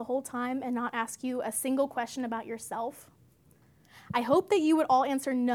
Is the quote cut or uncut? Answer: uncut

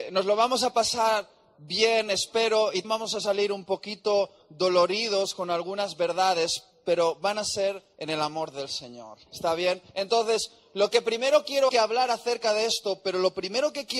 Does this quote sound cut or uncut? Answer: cut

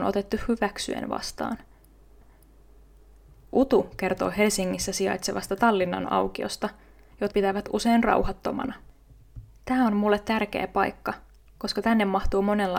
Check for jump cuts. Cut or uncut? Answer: cut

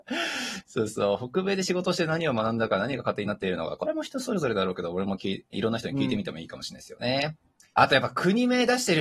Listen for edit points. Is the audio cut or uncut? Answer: cut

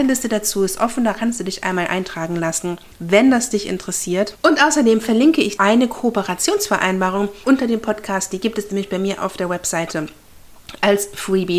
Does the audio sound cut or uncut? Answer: cut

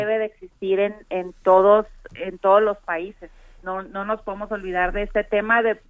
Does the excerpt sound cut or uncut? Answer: uncut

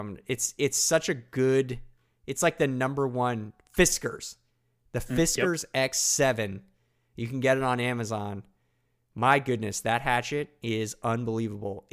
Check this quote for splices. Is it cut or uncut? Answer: uncut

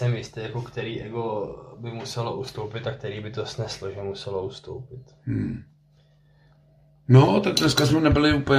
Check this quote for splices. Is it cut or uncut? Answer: uncut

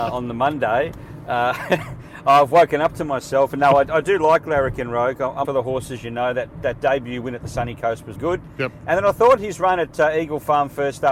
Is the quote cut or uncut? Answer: cut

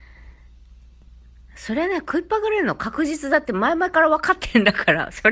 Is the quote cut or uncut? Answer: uncut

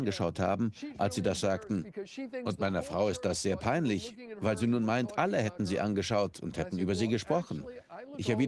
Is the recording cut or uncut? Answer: uncut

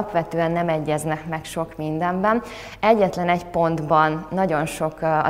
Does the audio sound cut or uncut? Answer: uncut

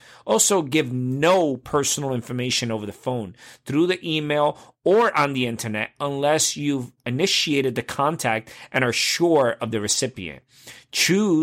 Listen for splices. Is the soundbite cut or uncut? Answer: uncut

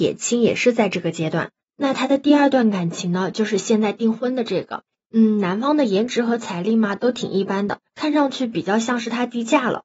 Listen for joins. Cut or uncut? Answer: uncut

